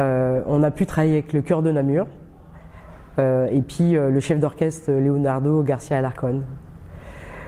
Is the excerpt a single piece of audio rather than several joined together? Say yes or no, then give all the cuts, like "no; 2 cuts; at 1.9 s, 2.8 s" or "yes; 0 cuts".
yes; 0 cuts